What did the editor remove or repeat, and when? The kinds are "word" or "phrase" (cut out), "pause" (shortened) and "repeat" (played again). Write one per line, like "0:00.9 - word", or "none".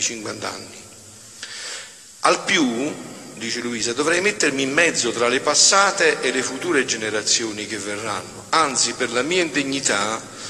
none